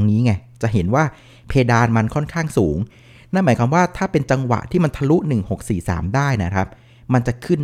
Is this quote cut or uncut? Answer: uncut